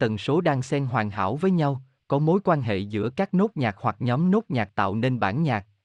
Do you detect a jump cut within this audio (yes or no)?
no